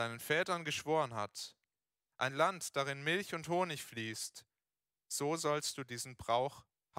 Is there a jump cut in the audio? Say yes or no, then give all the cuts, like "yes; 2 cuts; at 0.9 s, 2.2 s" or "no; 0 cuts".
no; 0 cuts